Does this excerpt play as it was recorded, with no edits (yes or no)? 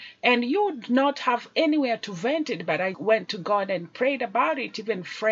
no